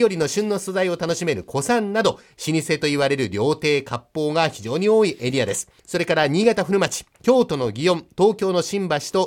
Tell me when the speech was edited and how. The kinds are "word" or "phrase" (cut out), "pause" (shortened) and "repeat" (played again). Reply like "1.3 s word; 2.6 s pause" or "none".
5.8 s pause